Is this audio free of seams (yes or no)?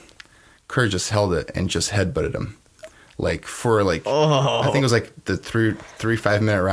yes